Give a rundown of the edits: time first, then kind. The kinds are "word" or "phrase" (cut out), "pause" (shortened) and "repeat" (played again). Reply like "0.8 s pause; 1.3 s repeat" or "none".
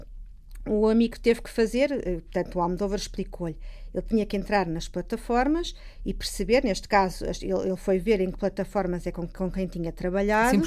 none